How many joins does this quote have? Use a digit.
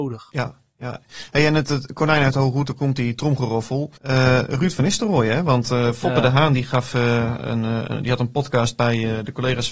1